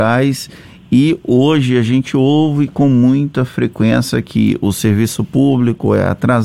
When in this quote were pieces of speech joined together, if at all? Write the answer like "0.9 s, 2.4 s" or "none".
none